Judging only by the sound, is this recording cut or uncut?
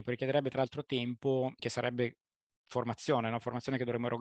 cut